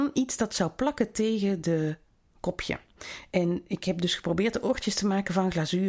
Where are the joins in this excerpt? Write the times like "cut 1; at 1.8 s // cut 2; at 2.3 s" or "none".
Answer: cut 1; at 2.3 s